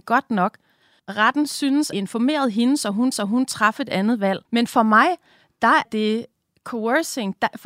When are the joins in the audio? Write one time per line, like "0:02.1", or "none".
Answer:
0:01.9
0:03.1
0:04.4
0:05.8

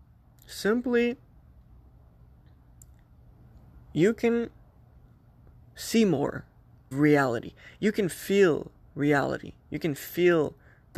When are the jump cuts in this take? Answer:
0:06.9

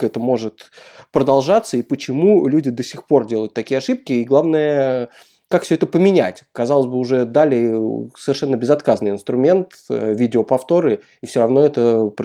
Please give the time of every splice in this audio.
none

